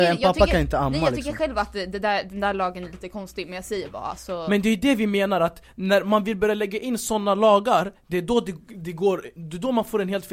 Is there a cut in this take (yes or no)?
no